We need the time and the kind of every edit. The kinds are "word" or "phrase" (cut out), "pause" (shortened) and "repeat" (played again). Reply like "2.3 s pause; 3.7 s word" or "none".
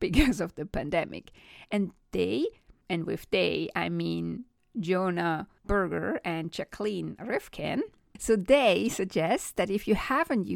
none